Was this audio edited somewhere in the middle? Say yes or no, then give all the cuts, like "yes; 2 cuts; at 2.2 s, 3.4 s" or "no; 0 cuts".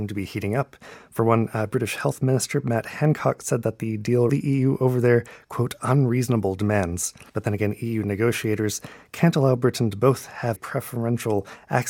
yes; 3 cuts; at 4.3 s, 7.3 s, 10.6 s